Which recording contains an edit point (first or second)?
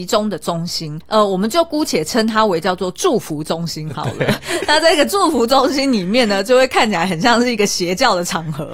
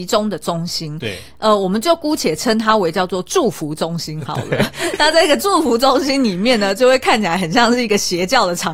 first